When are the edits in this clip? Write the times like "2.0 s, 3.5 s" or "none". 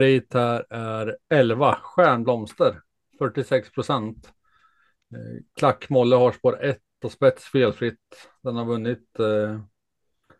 7.0 s